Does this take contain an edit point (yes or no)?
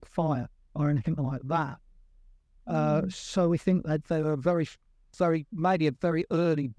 no